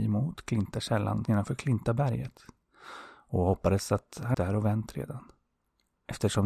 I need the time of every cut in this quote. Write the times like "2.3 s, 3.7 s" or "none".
1.2 s, 4.3 s